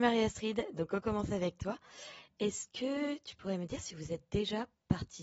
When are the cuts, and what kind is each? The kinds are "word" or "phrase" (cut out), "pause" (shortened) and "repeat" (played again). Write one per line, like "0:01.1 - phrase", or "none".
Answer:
none